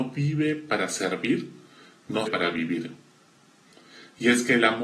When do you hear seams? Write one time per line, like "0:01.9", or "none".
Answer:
0:02.3